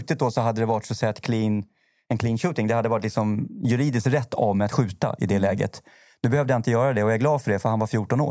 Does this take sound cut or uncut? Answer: uncut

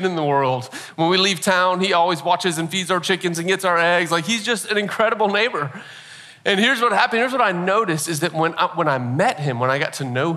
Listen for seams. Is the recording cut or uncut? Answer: uncut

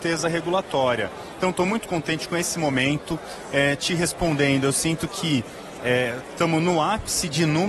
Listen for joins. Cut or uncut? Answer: uncut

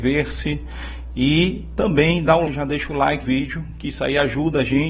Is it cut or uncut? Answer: cut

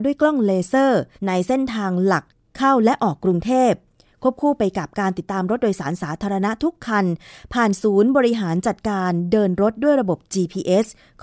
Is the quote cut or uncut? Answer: cut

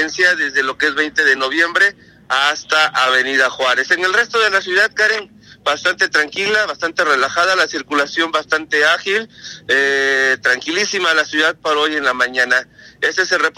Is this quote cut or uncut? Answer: uncut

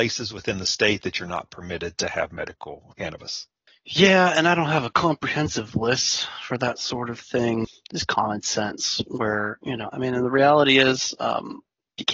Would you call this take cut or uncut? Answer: uncut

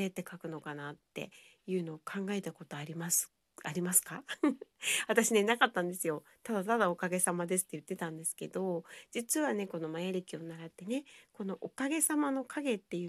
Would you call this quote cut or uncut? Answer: uncut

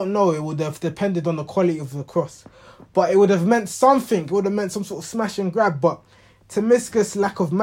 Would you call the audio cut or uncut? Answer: uncut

